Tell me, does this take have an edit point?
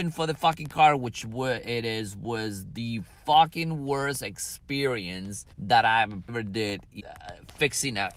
yes; 3 cuts; at 5.5 s, 6.3 s, 7.0 s

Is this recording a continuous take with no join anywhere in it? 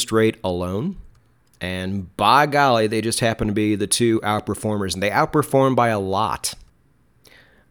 yes; 0 cuts

